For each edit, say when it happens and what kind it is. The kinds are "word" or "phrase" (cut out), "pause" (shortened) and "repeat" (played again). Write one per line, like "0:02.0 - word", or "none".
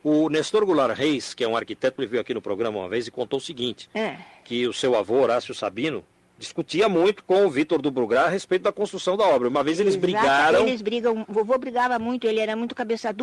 0:06.1 - pause

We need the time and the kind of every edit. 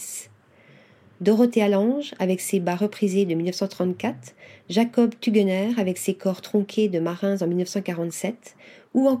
none

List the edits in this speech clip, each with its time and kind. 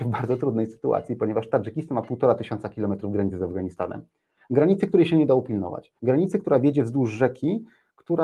0:06.0 - pause

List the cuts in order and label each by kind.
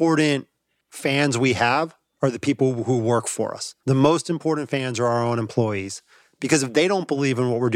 0:03.8 - pause

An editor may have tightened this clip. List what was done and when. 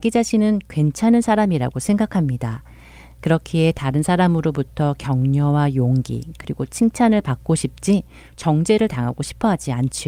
none

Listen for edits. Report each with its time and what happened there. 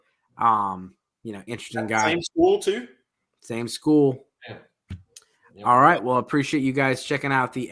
0:01.5 - word

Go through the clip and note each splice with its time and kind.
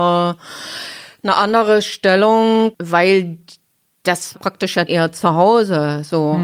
0:04.3 - word
0:04.9 - word

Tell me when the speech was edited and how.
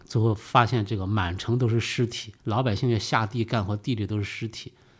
0:02.4 - pause

